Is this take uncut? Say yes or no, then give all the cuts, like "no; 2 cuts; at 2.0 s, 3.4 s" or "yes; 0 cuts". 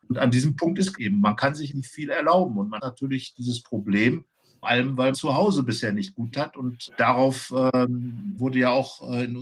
no; 8 cuts; at 1.0 s, 1.7 s, 2.8 s, 4.6 s, 5.1 s, 6.3 s, 6.9 s, 8.4 s